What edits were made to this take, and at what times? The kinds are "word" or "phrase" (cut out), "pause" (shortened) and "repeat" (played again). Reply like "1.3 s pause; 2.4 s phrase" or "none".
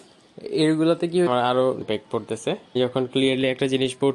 1.3 s word; 1.8 s word; 2.8 s word